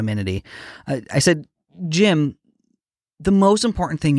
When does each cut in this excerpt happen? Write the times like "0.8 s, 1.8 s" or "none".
none